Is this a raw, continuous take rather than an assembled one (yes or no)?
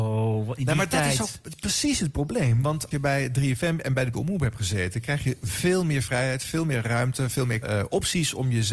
no